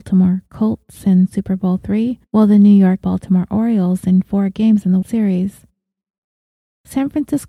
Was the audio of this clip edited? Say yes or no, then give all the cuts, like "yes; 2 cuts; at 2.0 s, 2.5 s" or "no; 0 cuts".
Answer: yes; 3 cuts; at 2.3 s, 3.0 s, 5.0 s